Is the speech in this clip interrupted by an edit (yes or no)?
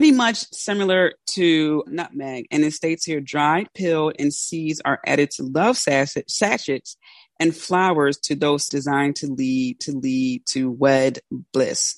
yes